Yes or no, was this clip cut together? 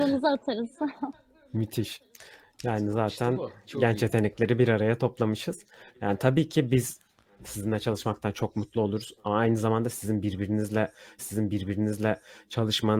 yes